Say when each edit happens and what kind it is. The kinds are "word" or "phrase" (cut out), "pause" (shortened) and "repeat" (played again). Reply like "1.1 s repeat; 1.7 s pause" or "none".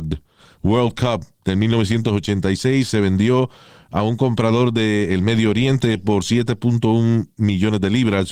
none

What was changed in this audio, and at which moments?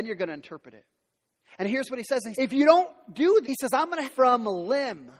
2.3 s word; 3.4 s word; 4.1 s phrase

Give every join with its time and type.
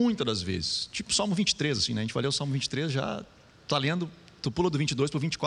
none

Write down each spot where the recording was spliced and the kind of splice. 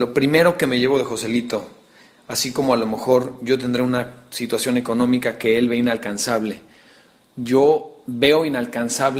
none

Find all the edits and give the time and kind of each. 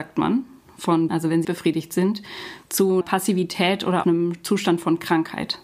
1.1 s word; 1.4 s word; 3.0 s word; 4.0 s word

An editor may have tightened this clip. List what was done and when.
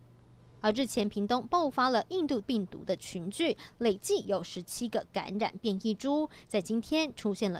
2.4 s word

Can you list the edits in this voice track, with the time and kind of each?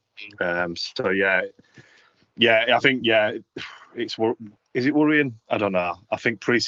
none

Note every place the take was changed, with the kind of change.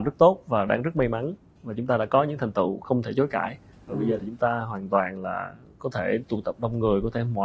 none

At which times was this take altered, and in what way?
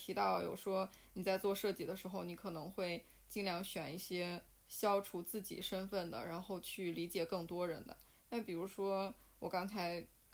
none

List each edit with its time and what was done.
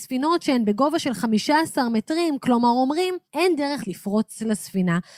3.2 s pause; 3.8 s word

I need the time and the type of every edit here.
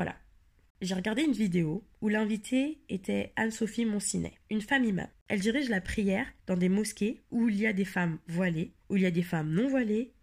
1.9 s pause; 4.4 s pause; 5.1 s pause; 6.4 s pause; 7.2 s pause; 8.8 s pause

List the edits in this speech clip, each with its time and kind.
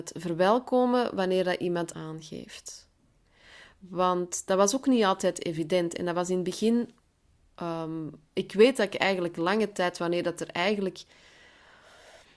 1.9 s phrase

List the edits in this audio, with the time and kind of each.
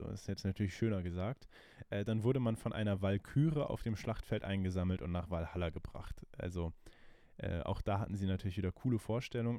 none

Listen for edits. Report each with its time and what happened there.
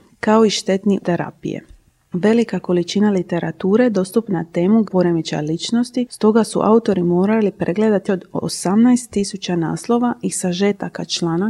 1.0 s word; 4.3 s word; 4.8 s word; 8.1 s word

